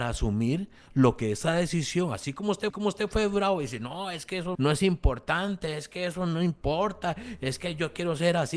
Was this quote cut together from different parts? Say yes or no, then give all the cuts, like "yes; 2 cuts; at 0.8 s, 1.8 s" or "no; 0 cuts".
yes; 2 cuts; at 2.7 s, 4.5 s